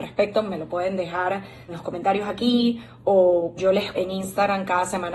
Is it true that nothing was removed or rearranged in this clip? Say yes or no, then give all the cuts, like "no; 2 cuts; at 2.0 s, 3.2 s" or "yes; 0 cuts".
no; 3 cuts; at 1.7 s, 3.6 s, 3.9 s